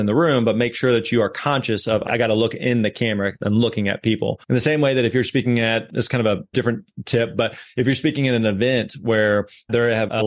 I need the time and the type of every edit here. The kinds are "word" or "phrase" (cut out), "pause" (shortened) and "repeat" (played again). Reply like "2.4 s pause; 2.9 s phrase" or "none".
4.4 s pause